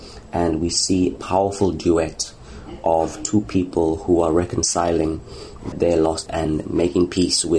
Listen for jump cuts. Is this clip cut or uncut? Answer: cut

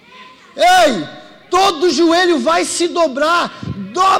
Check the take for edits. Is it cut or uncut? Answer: uncut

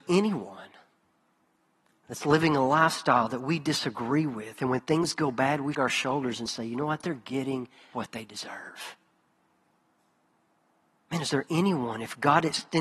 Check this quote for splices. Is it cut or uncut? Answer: cut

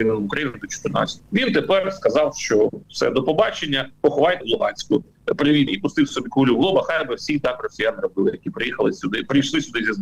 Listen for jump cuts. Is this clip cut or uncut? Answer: cut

